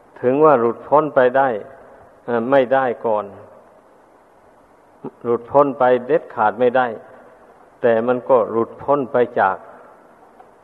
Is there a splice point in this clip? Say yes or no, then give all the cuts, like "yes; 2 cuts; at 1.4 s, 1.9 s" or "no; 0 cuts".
no; 0 cuts